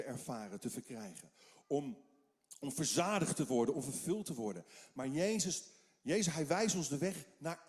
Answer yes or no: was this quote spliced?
no